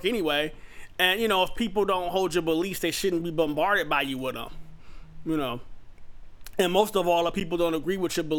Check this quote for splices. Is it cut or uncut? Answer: uncut